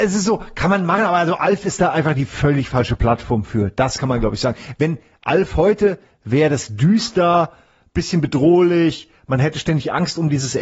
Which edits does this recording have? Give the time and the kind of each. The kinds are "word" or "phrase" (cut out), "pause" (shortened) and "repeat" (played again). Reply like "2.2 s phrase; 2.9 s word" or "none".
none